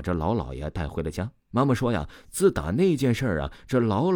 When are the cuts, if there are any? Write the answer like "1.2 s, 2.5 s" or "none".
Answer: 1.4 s